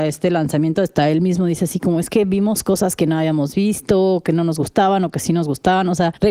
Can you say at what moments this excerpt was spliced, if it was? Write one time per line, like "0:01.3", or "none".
none